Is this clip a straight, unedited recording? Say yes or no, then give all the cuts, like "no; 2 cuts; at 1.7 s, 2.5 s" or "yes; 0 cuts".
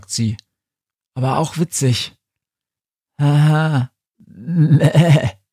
yes; 0 cuts